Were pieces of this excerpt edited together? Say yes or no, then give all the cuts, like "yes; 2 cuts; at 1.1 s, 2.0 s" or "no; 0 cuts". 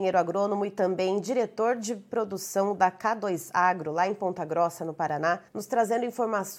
yes; 1 cut; at 5.5 s